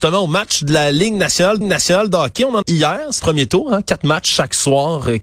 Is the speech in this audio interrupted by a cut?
yes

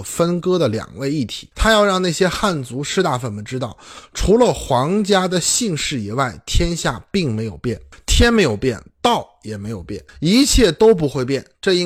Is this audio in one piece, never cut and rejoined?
no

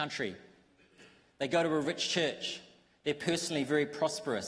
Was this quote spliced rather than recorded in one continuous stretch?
no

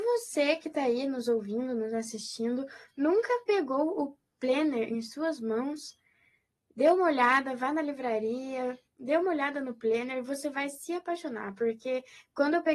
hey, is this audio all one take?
yes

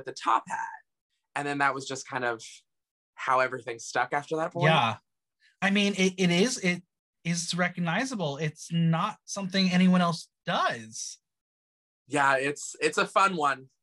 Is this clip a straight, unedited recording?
yes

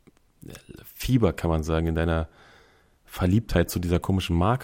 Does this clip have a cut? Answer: no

